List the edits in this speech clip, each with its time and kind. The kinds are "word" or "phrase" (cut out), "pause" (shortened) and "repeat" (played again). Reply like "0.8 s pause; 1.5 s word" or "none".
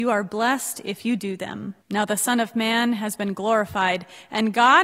1.8 s pause